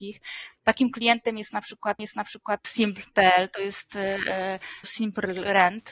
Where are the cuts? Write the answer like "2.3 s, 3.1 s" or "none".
2.0 s, 4.8 s